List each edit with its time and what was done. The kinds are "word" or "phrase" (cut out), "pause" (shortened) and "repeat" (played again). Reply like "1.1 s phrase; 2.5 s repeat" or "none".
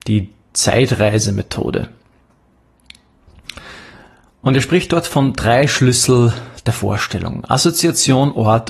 none